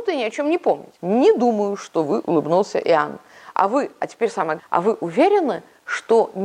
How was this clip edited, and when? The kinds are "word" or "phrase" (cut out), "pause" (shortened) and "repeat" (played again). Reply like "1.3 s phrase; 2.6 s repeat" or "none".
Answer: 1.0 s pause; 2.2 s word; 4.6 s word